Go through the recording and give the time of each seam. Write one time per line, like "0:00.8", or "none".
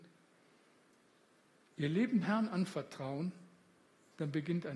0:02.2